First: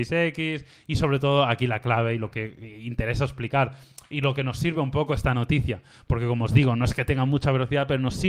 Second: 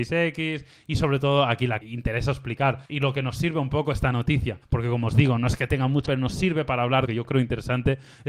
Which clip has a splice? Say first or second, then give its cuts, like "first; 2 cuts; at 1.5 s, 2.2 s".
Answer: second; 5 cuts; at 1.8 s, 2.9 s, 4.6 s, 6.1 s, 7.1 s